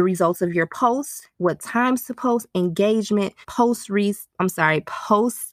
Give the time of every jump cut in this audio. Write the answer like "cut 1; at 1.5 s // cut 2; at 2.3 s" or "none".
cut 1; at 1.3 s // cut 2; at 3.4 s // cut 3; at 4.3 s